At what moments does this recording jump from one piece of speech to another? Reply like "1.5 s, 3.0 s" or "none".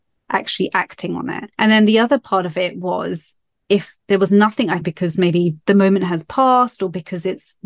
1.5 s, 4.0 s, 4.8 s